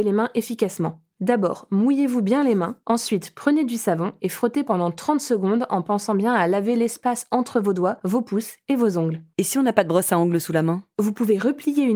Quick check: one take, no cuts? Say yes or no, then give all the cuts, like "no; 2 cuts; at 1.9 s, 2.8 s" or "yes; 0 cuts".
yes; 0 cuts